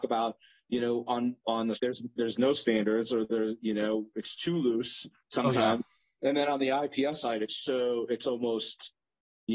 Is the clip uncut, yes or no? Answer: no